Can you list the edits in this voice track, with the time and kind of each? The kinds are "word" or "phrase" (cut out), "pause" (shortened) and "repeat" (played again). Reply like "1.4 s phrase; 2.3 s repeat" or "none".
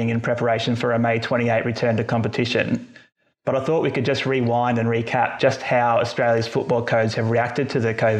none